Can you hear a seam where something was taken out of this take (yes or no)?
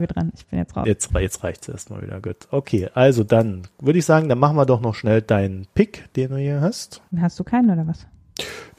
yes